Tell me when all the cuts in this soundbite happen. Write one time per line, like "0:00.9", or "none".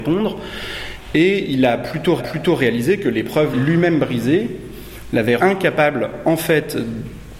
0:02.2
0:03.5
0:05.4